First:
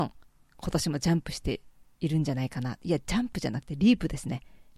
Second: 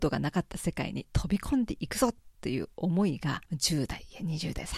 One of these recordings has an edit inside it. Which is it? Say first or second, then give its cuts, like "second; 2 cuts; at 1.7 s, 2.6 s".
second; 1 cut; at 3.4 s